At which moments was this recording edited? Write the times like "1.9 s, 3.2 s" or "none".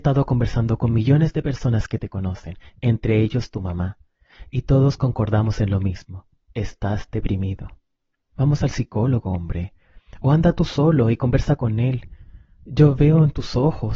none